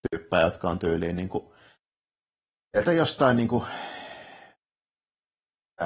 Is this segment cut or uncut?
uncut